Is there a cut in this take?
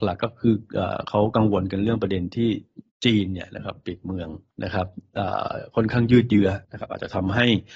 yes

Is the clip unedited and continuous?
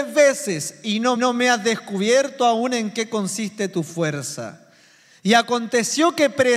no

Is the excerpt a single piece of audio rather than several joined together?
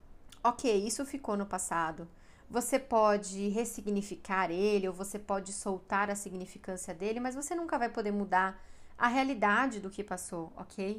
yes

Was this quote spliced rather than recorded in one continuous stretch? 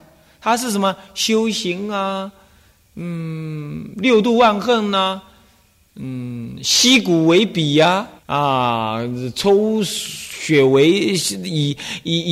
yes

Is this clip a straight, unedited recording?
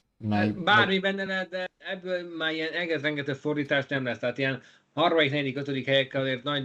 yes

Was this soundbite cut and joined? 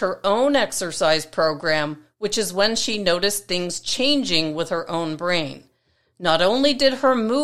no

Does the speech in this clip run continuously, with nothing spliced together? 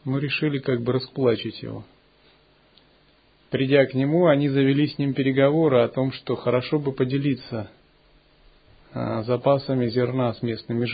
yes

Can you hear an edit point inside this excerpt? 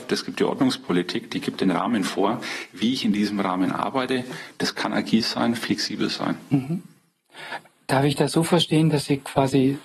no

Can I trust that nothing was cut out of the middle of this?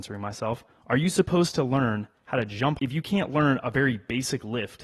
no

